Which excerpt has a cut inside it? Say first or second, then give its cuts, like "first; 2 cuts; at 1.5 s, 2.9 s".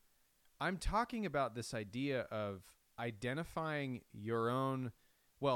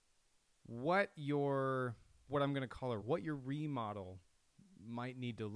second; 2 cuts; at 2.3 s, 3.0 s